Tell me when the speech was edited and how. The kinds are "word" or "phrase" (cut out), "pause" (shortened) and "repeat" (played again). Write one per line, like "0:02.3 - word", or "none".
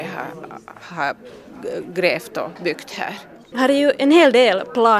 0:03.4 - pause